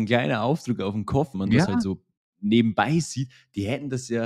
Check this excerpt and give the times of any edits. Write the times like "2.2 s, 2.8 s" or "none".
1.3 s